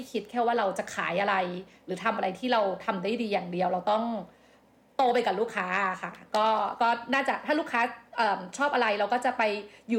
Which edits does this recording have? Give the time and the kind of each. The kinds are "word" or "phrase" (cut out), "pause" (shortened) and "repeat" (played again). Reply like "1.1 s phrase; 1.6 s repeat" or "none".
none